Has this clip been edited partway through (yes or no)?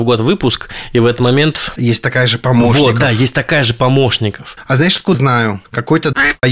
yes